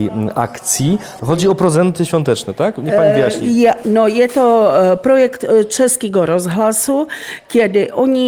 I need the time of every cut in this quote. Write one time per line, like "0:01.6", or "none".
none